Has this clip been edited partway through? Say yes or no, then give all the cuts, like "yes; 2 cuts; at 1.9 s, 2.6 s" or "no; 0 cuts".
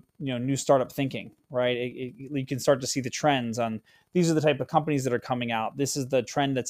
no; 0 cuts